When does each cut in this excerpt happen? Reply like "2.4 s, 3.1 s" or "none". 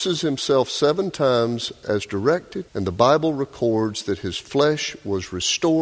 2.7 s

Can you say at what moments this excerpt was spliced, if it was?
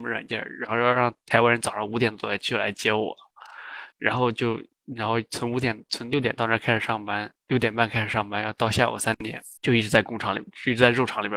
3.9 s, 9.6 s

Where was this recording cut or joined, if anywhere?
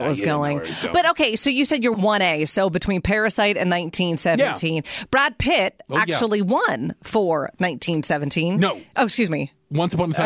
1.9 s

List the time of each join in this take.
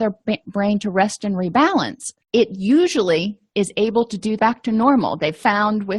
2.2 s, 4.4 s

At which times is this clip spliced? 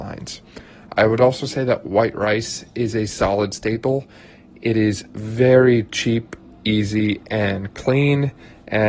none

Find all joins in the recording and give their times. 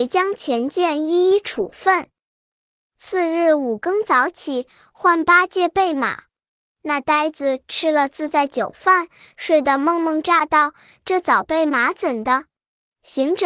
none

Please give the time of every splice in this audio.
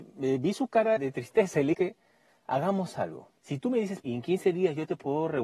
1.0 s, 1.7 s, 3.4 s, 4.0 s

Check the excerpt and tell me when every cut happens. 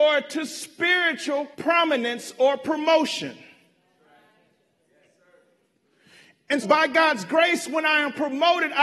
1.5 s, 6.6 s

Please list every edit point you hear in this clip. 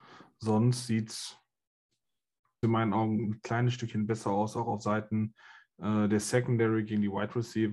2.6 s

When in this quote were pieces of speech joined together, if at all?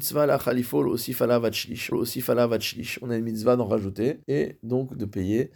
1.9 s, 4.2 s

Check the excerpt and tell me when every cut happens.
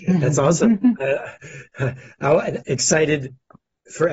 2.6 s

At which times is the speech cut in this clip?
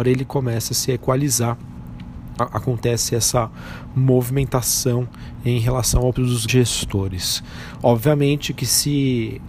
2.4 s, 6.2 s, 6.5 s

